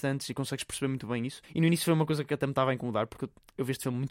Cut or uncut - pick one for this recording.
cut